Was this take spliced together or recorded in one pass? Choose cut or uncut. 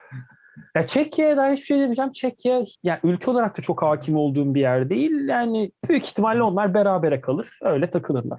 cut